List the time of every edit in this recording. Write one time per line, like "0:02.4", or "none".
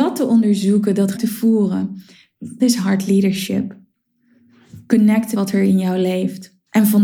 0:01.1
0:02.6
0:05.3